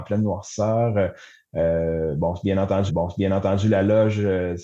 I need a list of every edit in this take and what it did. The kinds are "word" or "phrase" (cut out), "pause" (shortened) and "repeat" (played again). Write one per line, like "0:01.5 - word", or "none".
0:02.9 - repeat